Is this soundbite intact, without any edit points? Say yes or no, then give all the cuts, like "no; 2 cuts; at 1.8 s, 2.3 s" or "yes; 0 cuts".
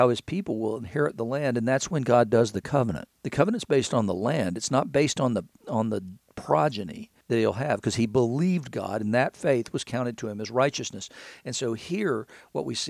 no; 2 cuts; at 3.1 s, 7.2 s